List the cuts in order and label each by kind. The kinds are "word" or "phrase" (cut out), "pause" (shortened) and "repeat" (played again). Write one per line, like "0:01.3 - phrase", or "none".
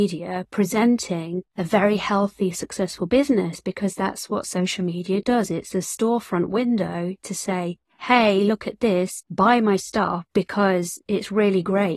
0:01.5 - pause

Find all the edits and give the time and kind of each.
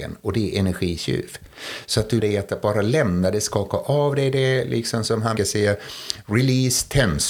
0:02.2 - word
0:05.4 - word

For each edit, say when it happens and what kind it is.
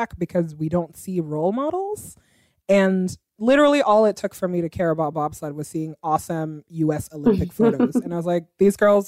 none

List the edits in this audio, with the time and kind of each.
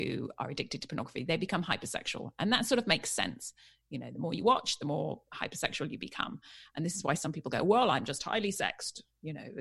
none

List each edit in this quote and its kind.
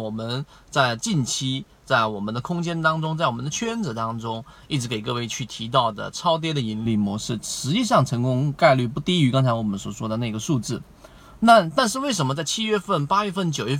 none

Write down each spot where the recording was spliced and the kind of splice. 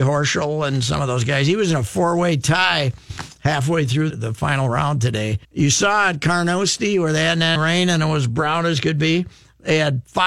0:04.1 - word
0:05.4 - pause
0:07.6 - word

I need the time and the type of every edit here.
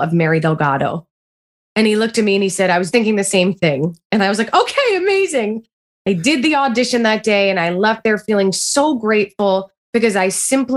0:02.9 - word

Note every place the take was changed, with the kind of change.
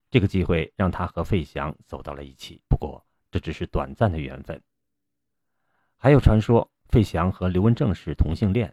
0:02.7 - pause

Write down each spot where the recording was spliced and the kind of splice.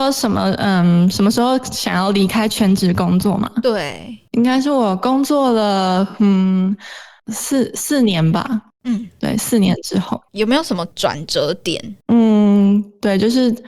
0:12.0 - pause

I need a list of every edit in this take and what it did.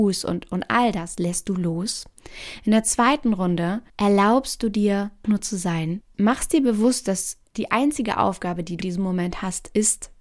0:03.9 - pause
0:05.2 - word
0:06.1 - word
0:08.8 - word

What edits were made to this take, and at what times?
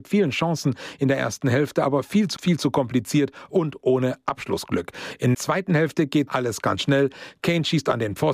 0:02.4 - word
0:05.3 - word
0:06.3 - word

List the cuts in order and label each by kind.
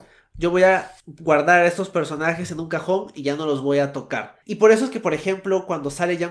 0:01.0 - pause
0:04.4 - pause

